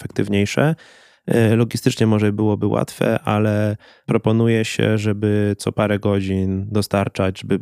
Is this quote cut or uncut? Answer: uncut